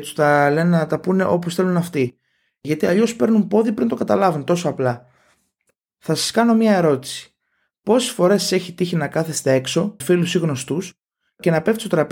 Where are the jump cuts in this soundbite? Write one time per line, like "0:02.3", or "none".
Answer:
0:10.0